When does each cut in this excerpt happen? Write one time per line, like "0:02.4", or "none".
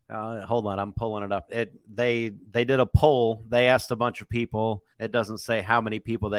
0:01.5
0:04.9